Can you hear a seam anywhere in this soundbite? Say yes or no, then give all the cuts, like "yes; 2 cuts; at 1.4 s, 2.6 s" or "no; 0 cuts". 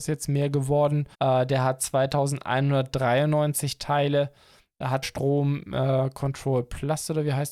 yes; 2 cuts; at 1.1 s, 5.0 s